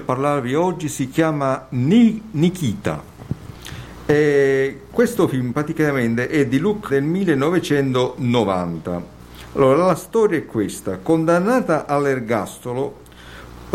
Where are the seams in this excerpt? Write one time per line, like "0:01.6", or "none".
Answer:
0:06.9